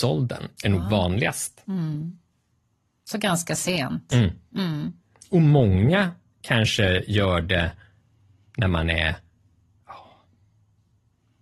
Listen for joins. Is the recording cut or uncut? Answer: uncut